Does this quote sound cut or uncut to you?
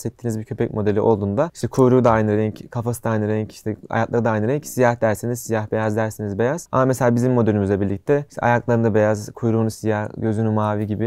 uncut